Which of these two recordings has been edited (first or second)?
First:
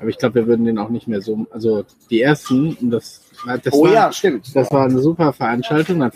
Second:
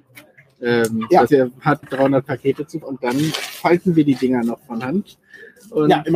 second